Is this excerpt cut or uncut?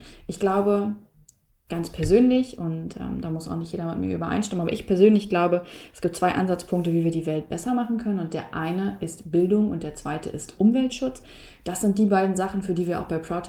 uncut